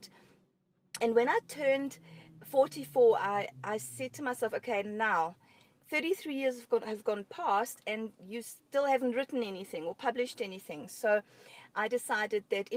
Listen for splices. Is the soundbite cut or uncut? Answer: uncut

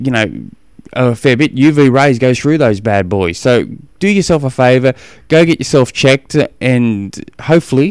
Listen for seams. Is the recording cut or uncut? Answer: uncut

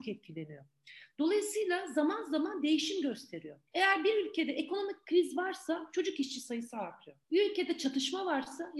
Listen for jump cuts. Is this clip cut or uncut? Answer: cut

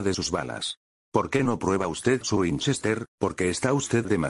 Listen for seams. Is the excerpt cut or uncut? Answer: cut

